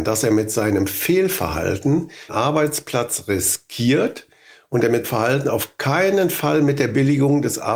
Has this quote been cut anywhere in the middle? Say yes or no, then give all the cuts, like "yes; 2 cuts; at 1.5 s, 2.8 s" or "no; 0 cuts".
yes; 2 cuts; at 2.3 s, 5.0 s